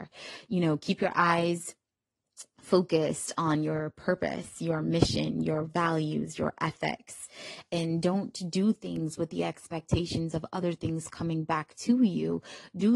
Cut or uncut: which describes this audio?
uncut